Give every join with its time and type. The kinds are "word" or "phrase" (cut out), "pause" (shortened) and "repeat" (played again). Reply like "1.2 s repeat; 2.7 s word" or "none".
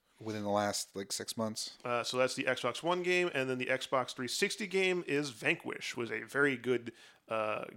5.9 s word